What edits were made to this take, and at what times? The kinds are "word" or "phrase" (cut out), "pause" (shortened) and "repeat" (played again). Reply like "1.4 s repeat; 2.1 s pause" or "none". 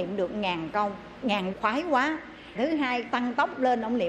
1.2 s word; 1.5 s word; 2.6 s word; 3.1 s word